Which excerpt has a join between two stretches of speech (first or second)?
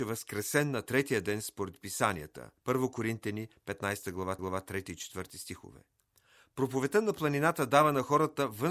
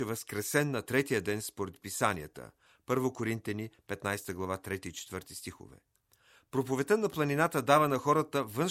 first